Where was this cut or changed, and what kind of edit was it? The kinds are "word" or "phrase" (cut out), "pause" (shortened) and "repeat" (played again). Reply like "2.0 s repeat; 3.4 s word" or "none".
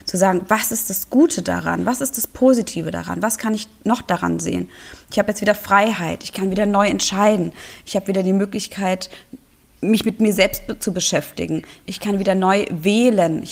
none

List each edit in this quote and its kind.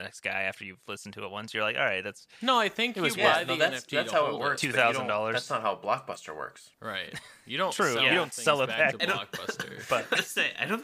6.7 s pause

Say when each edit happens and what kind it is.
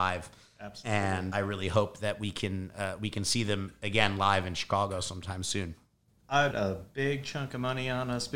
1.3 s word; 6.5 s word

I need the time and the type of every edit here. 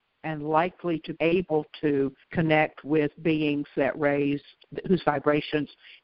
1.1 s word; 2.2 s pause

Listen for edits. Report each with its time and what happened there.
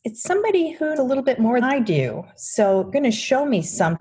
1.0 s word; 1.6 s word; 2.9 s word

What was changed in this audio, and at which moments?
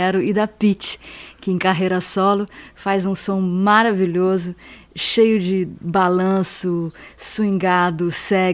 none

